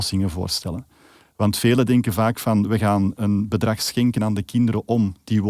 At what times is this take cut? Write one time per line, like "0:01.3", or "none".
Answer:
none